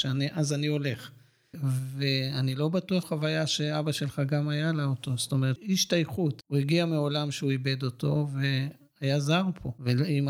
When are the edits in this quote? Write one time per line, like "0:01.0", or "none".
0:03.0